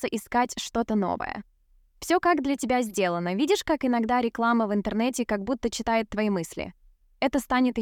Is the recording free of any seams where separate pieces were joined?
yes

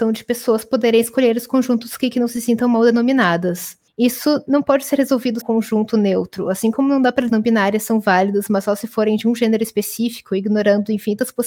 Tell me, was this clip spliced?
yes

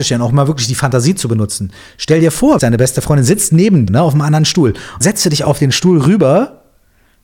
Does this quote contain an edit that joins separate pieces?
yes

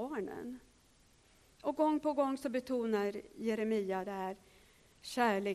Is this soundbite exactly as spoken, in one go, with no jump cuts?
yes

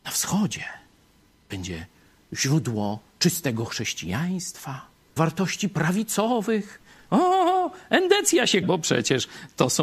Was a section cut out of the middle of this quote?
yes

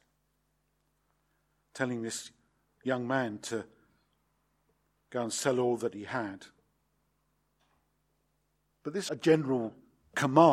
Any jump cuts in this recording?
yes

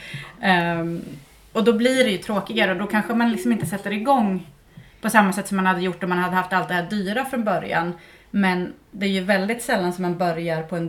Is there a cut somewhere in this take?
no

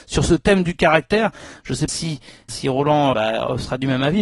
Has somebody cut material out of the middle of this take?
yes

